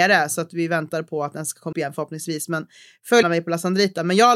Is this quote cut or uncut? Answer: cut